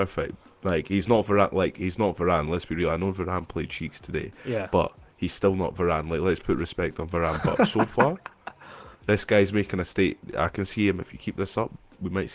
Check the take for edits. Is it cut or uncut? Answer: cut